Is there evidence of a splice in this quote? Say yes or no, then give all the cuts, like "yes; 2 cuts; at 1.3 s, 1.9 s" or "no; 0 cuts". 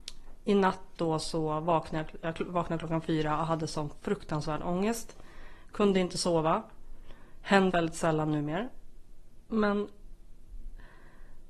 yes; 1 cut; at 7.7 s